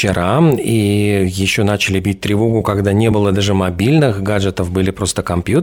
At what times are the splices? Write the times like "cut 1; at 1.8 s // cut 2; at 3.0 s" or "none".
none